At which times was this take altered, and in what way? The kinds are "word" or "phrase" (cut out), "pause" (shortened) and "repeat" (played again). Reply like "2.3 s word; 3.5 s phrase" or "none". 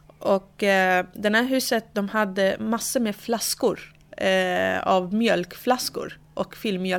none